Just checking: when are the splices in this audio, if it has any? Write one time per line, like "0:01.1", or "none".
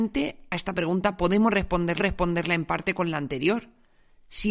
0:02.0